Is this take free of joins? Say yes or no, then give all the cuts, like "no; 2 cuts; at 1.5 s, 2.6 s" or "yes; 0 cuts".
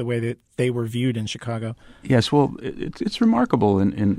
yes; 0 cuts